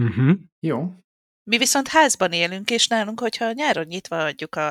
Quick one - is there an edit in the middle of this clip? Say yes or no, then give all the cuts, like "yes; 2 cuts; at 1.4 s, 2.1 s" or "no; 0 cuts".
no; 0 cuts